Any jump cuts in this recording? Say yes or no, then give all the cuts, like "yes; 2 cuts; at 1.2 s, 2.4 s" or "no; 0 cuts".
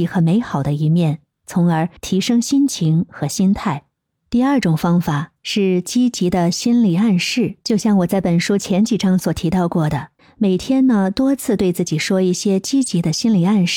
yes; 5 cuts; at 2.0 s, 3.9 s, 5.4 s, 7.6 s, 10.2 s